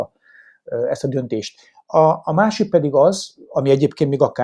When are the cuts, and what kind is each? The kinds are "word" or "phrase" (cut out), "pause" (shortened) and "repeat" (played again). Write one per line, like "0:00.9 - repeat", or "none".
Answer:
none